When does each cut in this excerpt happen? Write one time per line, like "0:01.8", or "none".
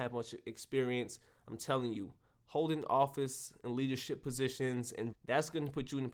0:05.1